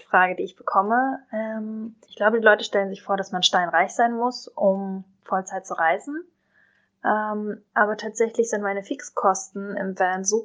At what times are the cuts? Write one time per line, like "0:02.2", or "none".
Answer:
0:02.0
0:07.7